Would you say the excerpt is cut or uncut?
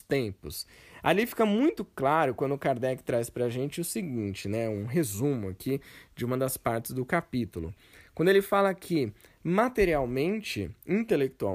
uncut